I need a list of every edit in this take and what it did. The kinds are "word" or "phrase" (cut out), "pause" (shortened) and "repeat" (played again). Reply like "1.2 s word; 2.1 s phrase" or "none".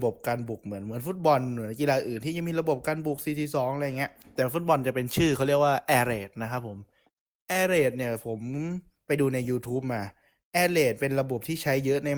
none